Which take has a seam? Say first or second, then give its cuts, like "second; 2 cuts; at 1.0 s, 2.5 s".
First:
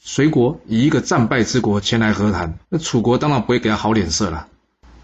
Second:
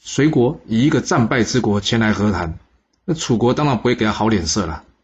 first; 1 cut; at 2.6 s